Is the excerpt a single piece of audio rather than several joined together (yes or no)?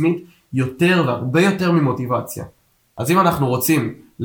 yes